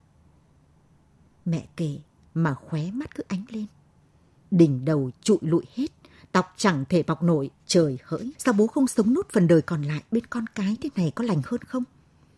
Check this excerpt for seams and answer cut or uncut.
cut